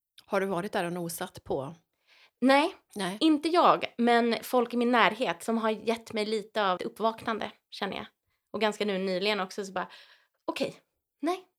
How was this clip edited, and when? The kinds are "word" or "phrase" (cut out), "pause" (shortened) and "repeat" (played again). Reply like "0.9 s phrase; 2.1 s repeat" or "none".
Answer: 6.8 s word